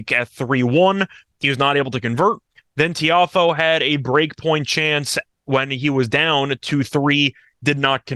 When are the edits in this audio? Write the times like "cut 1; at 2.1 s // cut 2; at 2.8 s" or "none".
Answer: none